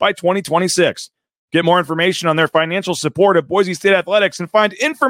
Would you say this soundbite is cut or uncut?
uncut